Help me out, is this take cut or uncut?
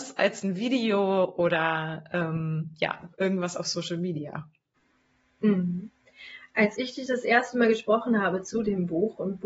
uncut